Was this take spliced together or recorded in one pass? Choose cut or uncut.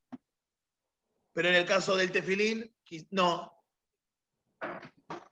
uncut